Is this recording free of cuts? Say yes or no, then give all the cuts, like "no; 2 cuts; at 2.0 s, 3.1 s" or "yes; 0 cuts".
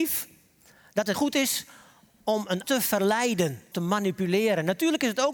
no; 3 cuts; at 1.1 s, 2.6 s, 3.7 s